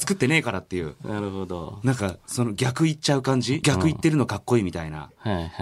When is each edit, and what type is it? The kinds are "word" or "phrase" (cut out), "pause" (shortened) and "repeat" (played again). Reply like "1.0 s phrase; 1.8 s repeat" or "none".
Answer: 3.6 s phrase